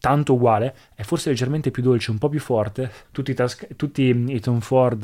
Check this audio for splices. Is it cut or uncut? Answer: cut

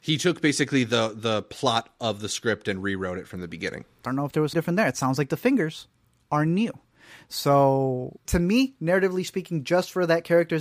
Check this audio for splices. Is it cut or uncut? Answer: cut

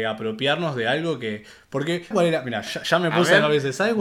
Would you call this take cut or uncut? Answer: cut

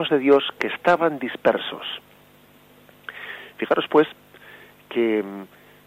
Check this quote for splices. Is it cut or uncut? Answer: uncut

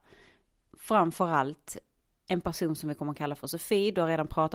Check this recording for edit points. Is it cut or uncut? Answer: uncut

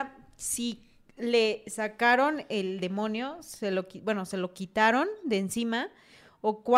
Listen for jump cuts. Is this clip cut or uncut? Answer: uncut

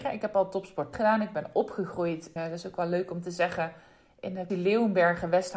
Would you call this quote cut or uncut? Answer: cut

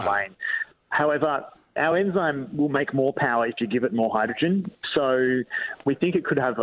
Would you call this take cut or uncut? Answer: uncut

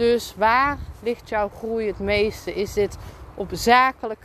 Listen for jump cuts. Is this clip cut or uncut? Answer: uncut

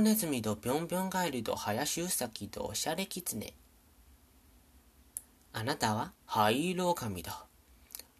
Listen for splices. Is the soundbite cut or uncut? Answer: cut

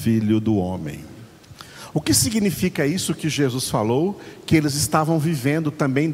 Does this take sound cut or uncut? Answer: uncut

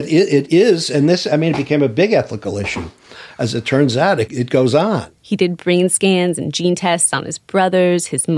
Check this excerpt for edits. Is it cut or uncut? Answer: cut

